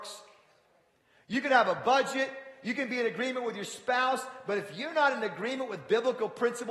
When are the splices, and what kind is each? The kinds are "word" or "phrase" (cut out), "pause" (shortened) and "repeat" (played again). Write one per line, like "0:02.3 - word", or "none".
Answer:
none